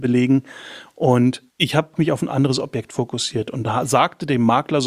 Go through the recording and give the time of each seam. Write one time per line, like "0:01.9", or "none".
0:01.5
0:02.0